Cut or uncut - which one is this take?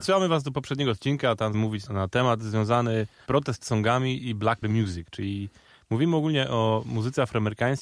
cut